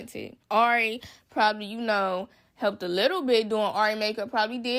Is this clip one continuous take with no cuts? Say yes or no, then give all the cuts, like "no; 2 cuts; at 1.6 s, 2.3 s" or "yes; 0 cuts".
yes; 0 cuts